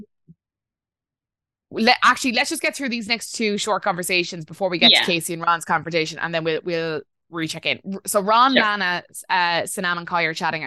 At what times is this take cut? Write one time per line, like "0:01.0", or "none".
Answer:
none